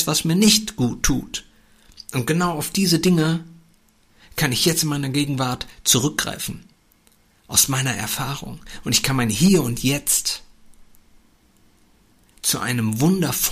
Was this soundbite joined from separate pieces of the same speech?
no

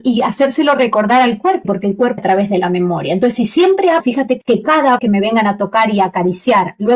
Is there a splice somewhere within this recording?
yes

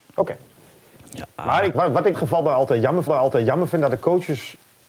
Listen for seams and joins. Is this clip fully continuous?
no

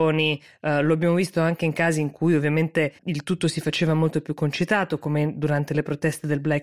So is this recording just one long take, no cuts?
no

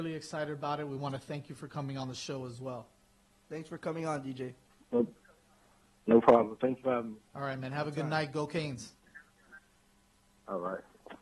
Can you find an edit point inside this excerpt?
no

